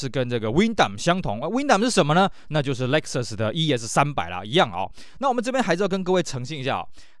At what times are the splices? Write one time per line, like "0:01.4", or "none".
none